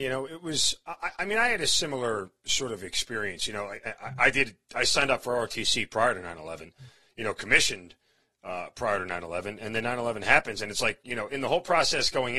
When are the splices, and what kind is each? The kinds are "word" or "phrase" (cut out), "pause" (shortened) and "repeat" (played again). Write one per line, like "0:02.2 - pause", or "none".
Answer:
none